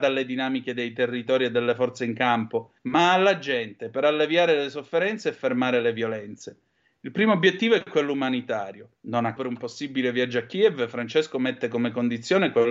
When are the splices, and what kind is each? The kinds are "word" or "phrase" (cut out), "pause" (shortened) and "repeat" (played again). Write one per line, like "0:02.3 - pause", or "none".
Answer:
0:02.8 - pause
0:09.0 - pause
0:09.4 - word